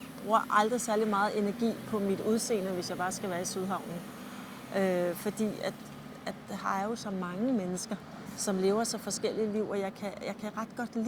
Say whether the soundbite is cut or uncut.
uncut